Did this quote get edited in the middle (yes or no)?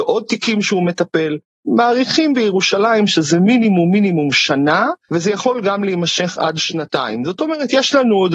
yes